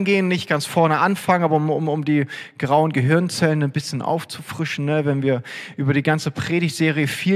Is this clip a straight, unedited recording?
yes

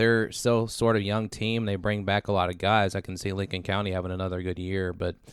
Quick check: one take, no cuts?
yes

